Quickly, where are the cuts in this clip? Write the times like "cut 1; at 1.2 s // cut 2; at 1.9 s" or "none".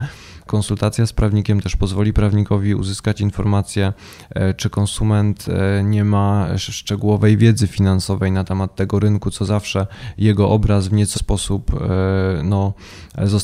cut 1; at 11.1 s